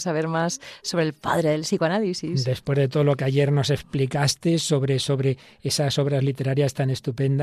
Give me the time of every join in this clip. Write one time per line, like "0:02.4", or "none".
none